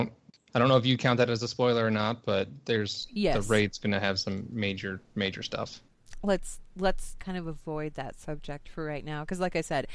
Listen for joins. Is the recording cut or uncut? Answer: cut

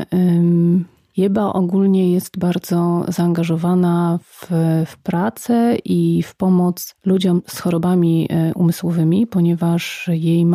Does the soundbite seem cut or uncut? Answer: uncut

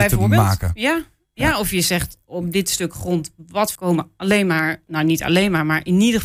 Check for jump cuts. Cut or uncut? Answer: cut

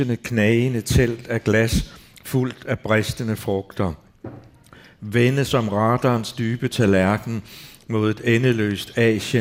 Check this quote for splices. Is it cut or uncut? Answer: uncut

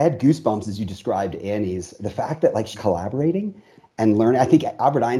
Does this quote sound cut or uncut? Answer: cut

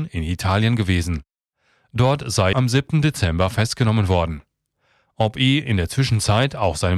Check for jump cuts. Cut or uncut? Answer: cut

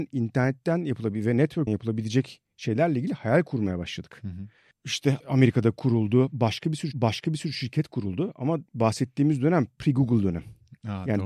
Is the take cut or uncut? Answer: cut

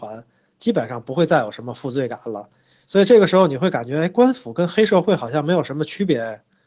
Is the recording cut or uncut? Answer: uncut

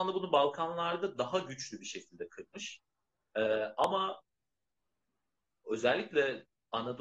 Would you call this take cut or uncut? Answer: uncut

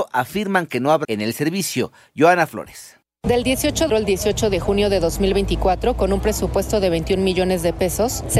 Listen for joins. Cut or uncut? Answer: cut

